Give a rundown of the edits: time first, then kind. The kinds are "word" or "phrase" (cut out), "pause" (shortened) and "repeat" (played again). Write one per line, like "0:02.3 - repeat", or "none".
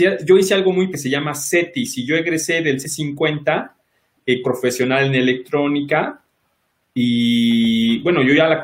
0:00.9 - phrase
0:02.8 - word
0:04.4 - phrase